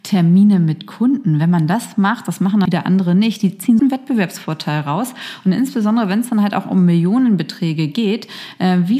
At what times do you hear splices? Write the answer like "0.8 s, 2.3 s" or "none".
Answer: 2.7 s, 3.8 s